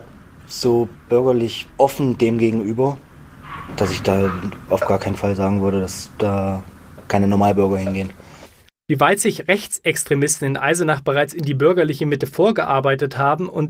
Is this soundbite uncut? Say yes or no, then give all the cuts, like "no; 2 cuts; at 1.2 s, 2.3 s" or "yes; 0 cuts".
no; 1 cut; at 1.7 s